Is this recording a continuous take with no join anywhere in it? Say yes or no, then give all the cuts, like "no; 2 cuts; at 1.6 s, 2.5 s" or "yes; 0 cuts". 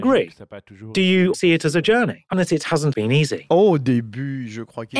no; 3 cuts; at 1.3 s, 2.3 s, 2.9 s